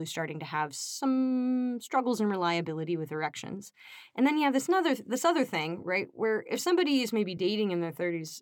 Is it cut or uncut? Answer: uncut